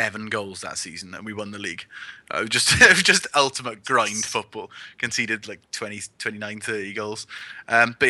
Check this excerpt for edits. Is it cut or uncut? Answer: uncut